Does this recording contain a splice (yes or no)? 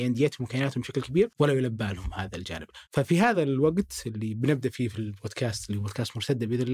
no